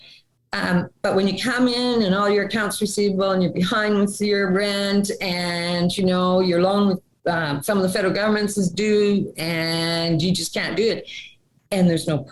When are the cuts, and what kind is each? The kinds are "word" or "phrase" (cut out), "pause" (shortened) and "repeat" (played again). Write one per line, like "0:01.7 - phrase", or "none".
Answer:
none

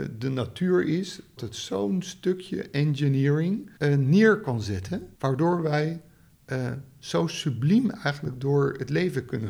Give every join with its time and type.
0:01.4 - word
0:03.8 - pause
0:05.1 - pause

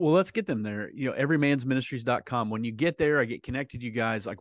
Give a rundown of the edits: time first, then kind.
none

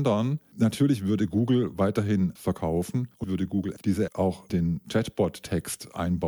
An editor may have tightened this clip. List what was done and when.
0:02.4 - word
0:03.2 - word
0:04.1 - word
0:04.5 - word

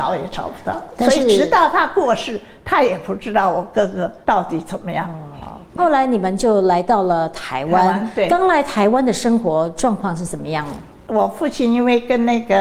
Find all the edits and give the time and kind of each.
0:04.2 - pause
0:05.7 - pause

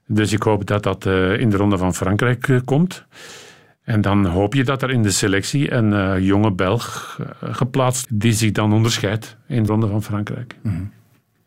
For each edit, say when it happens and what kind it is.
0:08.0 - word
0:09.7 - word

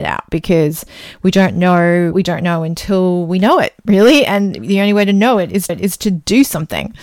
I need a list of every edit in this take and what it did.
0:02.1 - word
0:05.7 - repeat

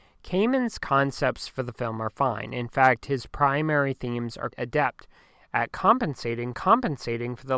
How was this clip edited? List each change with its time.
0:04.5 - word
0:06.5 - repeat

